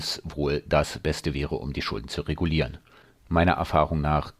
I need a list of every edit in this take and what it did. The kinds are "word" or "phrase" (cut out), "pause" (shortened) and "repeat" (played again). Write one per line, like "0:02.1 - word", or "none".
none

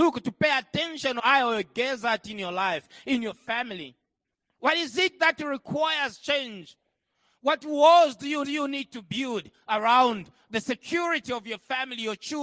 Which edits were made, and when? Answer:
0:01.2 - word
0:08.4 - repeat

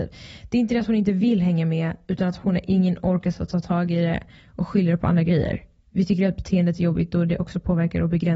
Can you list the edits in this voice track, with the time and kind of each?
none

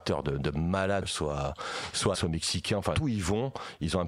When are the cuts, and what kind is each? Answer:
0:01.0 - word
0:02.1 - word
0:02.9 - word

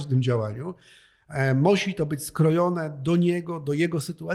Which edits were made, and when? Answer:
none

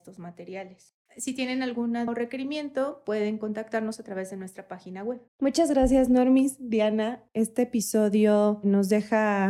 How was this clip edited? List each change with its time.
0:01.1 - pause
0:02.1 - word
0:05.3 - pause

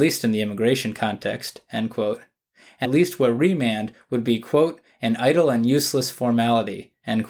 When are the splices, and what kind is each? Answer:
0:02.8 - word

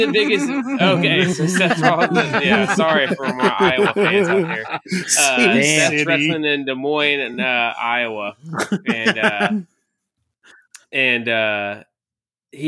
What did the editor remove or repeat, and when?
none

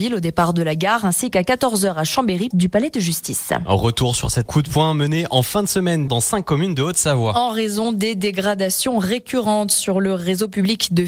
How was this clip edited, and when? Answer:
0:02.5 - word
0:04.5 - word
0:06.1 - word

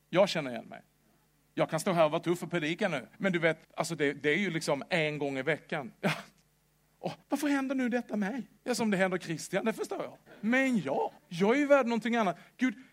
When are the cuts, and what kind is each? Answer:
0:01.3 - pause
0:03.1 - pause
0:03.6 - pause
0:07.2 - pause
0:08.6 - pause
0:10.3 - pause
0:11.2 - pause

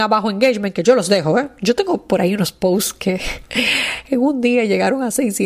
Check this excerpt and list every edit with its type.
none

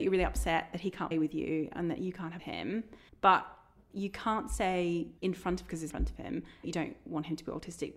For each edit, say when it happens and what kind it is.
0:01.1 - word
0:02.4 - phrase
0:03.1 - pause
0:05.2 - pause
0:05.9 - phrase
0:06.6 - word

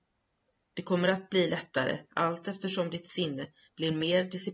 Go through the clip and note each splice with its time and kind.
none

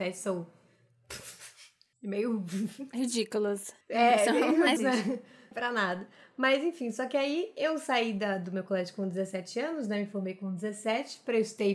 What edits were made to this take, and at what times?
0:03.8 - pause
0:04.8 - word
0:05.5 - phrase

